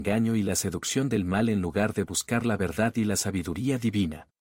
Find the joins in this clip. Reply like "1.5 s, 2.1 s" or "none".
none